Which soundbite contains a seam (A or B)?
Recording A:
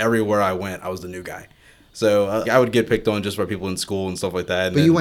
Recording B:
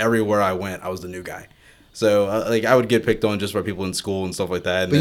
A